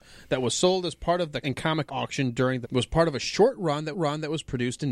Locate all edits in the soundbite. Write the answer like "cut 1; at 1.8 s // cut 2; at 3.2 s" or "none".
cut 1; at 1.4 s // cut 2; at 1.9 s // cut 3; at 2.6 s // cut 4; at 3.9 s

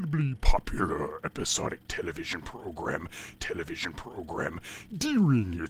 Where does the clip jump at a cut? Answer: cut 1; at 3.4 s

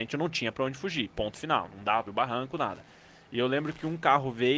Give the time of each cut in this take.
cut 1; at 2.0 s

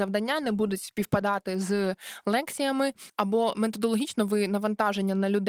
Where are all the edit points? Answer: none

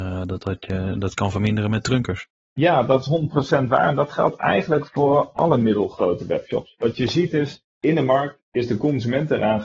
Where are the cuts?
cut 1; at 7.7 s

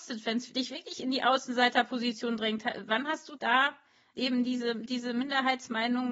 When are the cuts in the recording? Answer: cut 1; at 3.4 s

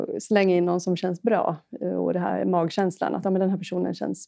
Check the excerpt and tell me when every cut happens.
none

